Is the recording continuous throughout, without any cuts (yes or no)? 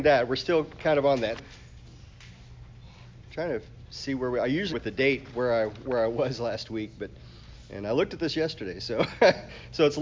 no